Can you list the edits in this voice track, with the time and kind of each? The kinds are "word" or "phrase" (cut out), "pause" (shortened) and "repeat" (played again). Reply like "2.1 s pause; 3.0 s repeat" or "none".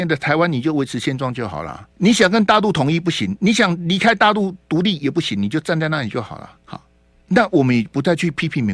1.9 s pause; 6.6 s pause

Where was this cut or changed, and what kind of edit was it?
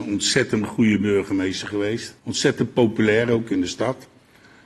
2.2 s pause

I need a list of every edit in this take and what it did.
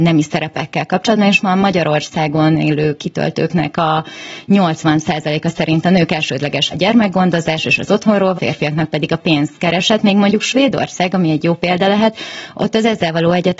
6.7 s word; 8.4 s phrase

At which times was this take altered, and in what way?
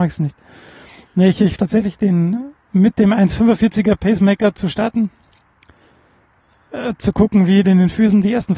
1.6 s word; 2.6 s pause; 7.6 s phrase

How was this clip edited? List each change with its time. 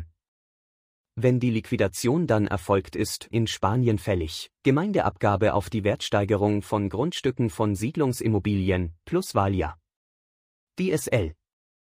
3.3 s phrase; 4.5 s pause

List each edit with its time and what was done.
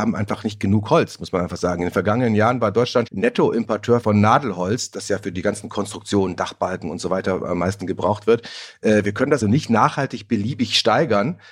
3.1 s word; 4.0 s word; 9.4 s word

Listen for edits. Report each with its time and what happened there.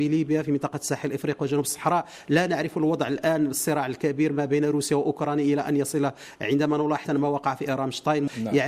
7.1 s word

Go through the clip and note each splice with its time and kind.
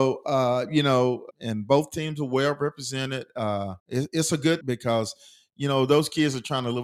1.3 s word; 3.8 s pause; 4.6 s phrase

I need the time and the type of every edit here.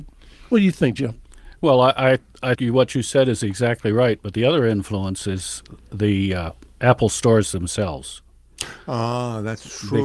2.5 s word

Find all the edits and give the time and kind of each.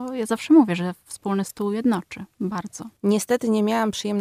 3.0 s pause

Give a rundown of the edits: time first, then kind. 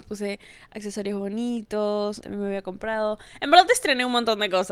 2.2 s phrase

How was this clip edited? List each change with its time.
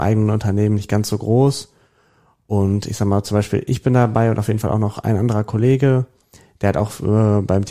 none

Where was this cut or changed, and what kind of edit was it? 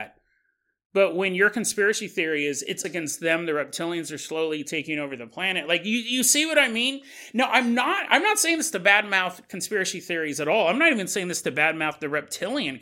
2.8 s word

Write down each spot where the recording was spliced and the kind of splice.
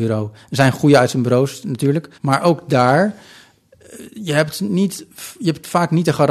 2.1 s pause

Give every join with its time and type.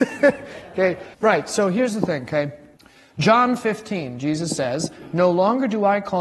1.1 s pause; 2.8 s pause

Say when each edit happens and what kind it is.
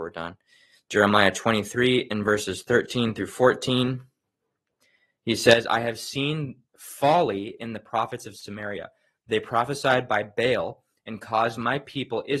none

